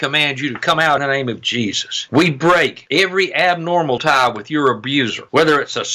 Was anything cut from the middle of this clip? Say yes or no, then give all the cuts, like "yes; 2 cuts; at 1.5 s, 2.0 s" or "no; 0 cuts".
yes; 2 cuts; at 1.0 s, 4.0 s